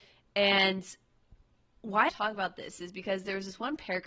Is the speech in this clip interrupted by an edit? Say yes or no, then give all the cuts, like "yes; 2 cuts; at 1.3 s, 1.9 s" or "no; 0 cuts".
yes; 1 cut; at 2.1 s